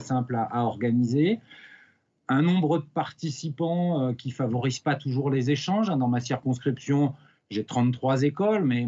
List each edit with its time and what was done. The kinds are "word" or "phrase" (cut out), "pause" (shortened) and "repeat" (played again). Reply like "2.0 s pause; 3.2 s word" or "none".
none